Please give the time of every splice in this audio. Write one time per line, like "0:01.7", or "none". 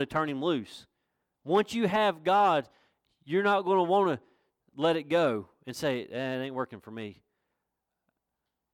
none